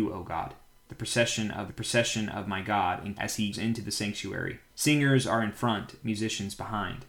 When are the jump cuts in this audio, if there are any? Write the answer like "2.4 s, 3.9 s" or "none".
1.7 s, 3.1 s, 3.5 s, 4.7 s